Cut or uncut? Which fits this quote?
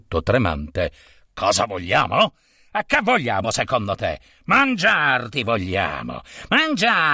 uncut